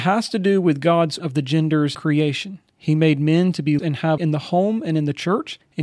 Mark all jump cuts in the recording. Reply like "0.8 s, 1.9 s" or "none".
1.2 s, 1.9 s, 3.8 s, 4.2 s